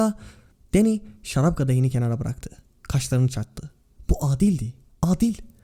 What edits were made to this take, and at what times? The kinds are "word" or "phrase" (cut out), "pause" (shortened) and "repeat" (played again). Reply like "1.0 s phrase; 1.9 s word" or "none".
none